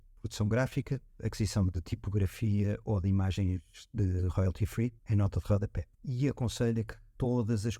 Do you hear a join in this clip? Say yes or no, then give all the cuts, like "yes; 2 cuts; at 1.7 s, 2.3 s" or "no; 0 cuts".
yes; 2 cuts; at 5.0 s, 5.9 s